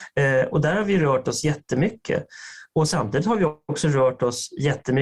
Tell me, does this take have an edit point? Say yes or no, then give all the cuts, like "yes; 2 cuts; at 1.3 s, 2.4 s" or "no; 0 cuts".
no; 0 cuts